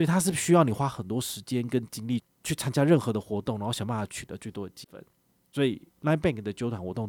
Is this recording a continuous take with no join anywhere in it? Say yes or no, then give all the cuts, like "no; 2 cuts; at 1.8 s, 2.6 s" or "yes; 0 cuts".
no; 1 cut; at 5.9 s